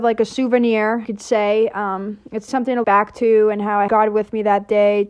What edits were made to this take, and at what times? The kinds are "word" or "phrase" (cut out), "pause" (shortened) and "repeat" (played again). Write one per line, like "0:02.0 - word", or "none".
0:01.0 - word
0:02.5 - word
0:02.8 - word
0:03.9 - word